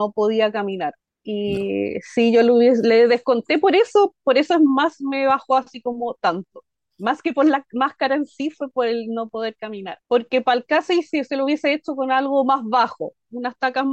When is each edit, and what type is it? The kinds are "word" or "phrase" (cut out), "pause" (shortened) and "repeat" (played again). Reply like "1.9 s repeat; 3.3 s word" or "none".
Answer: 1.1 s pause; 6.7 s pause; 10.0 s pause